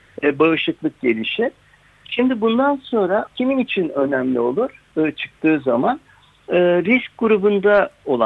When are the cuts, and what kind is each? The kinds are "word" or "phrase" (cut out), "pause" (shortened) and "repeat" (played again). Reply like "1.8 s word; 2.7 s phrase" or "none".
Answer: 3.3 s word